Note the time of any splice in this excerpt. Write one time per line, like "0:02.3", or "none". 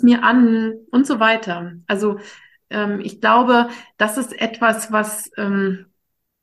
none